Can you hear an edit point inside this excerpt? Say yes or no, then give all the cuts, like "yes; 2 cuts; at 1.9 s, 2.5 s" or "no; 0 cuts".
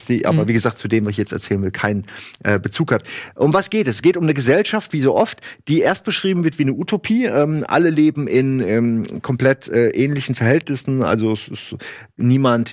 no; 0 cuts